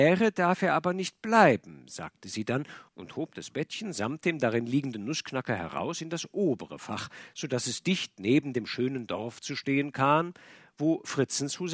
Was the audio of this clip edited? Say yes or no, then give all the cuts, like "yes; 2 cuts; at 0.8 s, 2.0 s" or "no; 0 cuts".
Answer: yes; 1 cut; at 2.9 s